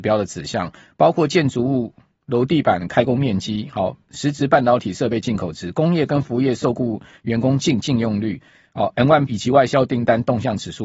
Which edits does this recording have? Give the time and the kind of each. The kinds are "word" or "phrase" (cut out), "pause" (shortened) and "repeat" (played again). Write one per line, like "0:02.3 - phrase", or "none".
0:09.3 - phrase